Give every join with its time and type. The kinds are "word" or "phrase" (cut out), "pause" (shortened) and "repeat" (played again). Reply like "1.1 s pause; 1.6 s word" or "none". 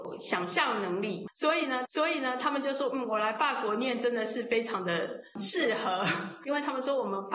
1.8 s repeat